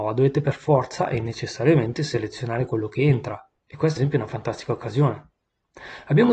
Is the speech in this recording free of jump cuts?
no; 2 cuts; at 3.6 s, 4.0 s

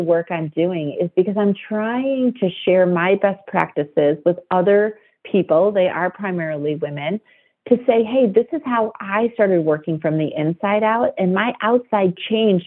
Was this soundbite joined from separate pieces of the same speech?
no; 0 cuts

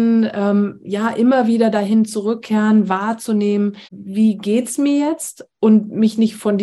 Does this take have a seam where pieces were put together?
yes; 1 cut; at 3.8 s

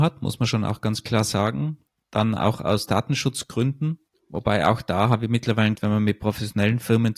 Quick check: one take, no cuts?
no; 1 cut; at 5.7 s

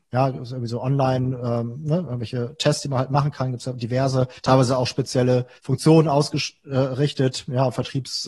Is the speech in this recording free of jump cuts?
no; 2 cuts; at 4.4 s, 5.6 s

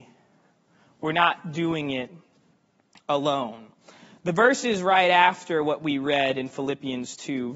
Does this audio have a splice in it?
no; 0 cuts

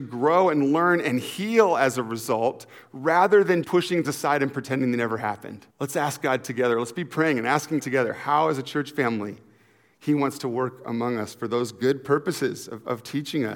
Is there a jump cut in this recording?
yes; 4 cuts; at 3.6 s, 4.0 s, 5.7 s, 7.8 s

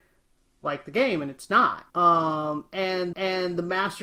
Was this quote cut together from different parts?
yes; 2 cuts; at 1.9 s, 3.1 s

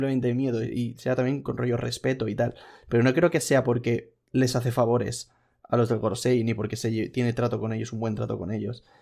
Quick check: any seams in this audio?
no; 0 cuts

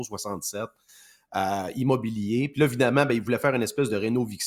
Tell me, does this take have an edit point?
no; 0 cuts

